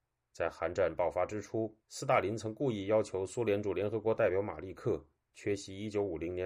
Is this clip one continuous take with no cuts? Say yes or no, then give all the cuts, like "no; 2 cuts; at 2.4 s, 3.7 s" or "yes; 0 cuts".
no; 1 cut; at 1.8 s